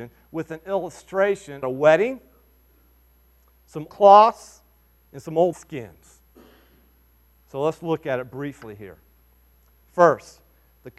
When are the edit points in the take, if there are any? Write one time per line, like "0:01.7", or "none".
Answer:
0:01.6
0:03.9
0:05.5